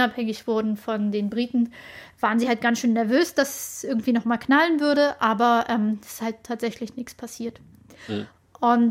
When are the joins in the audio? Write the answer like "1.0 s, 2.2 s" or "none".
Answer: none